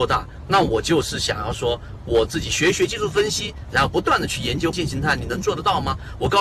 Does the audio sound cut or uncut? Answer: cut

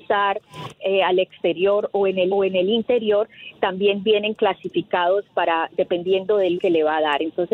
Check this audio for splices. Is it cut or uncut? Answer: cut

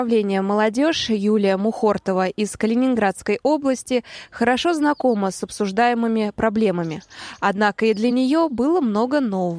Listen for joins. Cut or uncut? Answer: uncut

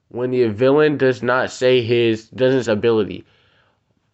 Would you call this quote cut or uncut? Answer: cut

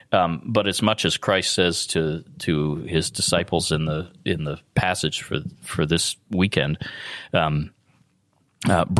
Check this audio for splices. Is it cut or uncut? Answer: uncut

